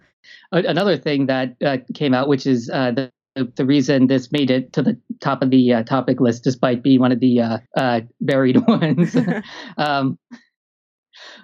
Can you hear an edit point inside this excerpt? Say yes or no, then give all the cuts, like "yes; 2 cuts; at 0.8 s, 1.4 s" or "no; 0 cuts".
yes; 1 cut; at 7.7 s